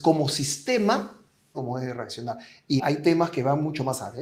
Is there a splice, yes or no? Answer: yes